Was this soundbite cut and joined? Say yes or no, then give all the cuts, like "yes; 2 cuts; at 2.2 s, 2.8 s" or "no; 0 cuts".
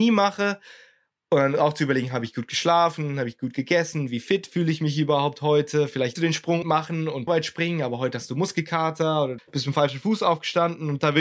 yes; 4 cuts; at 6.2 s, 6.6 s, 7.3 s, 9.4 s